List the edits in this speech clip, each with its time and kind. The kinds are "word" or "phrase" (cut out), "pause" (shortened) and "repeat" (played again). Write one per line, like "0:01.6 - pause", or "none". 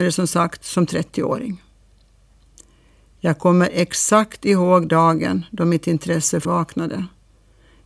0:06.4 - word